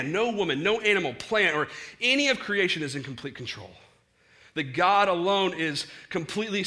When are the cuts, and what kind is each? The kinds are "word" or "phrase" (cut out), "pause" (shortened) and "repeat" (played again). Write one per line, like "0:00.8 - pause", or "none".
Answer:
none